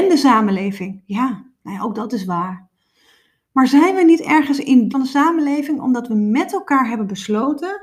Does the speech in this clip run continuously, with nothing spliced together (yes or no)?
no